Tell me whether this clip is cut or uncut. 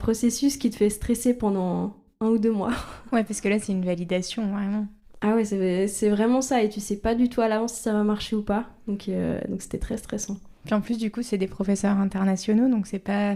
uncut